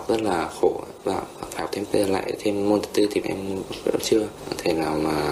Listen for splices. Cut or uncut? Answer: cut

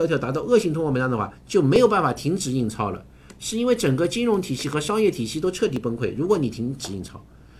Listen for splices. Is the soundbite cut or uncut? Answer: cut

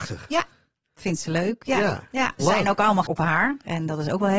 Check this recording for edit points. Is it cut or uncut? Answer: cut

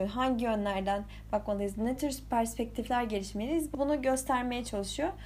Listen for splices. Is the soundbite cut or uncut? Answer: uncut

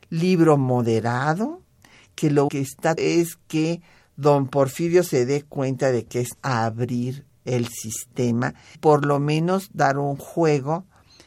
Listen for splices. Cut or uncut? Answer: cut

